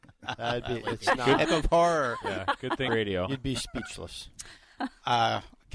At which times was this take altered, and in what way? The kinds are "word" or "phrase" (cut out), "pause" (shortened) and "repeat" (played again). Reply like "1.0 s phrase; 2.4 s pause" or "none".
1.5 s phrase; 2.9 s word